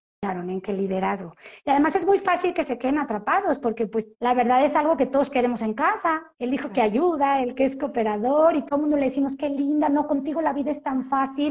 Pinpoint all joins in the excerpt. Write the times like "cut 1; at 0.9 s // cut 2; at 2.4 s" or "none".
cut 1; at 4.1 s // cut 2; at 6.3 s